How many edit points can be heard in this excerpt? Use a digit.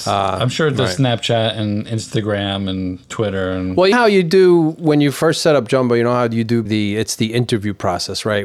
3